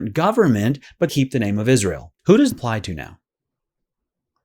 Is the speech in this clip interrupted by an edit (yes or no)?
yes